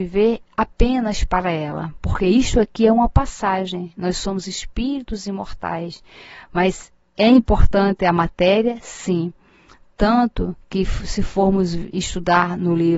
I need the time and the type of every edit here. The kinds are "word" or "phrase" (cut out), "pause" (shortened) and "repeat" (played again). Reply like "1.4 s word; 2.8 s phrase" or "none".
10.6 s pause